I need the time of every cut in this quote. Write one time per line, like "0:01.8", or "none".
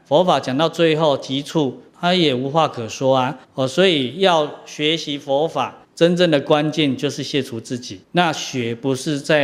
0:01.9
0:03.4
0:05.8
0:08.0